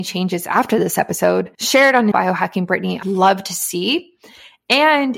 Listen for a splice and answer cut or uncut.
cut